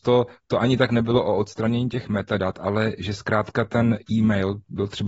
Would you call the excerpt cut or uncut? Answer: uncut